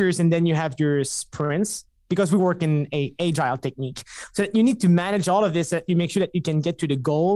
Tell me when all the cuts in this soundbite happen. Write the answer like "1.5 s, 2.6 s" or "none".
none